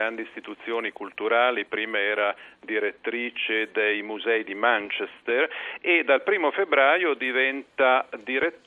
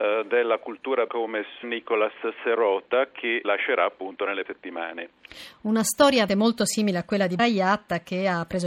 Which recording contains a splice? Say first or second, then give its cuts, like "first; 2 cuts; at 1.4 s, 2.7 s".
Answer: second; 6 cuts; at 1.1 s, 1.6 s, 3.4 s, 4.5 s, 6.3 s, 7.4 s